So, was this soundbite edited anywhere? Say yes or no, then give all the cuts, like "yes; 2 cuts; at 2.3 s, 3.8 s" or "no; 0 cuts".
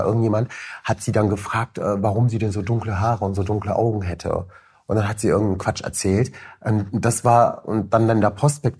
no; 0 cuts